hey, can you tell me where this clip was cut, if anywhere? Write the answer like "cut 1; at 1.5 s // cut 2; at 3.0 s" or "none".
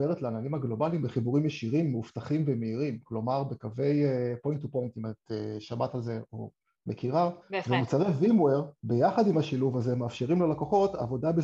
cut 1; at 7.4 s // cut 2; at 8.8 s